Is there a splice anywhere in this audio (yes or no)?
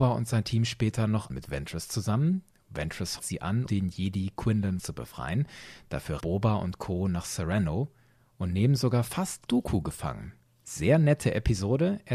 yes